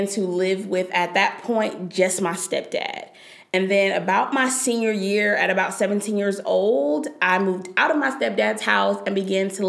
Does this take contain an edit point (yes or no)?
no